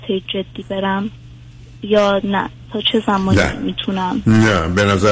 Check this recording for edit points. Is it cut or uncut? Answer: uncut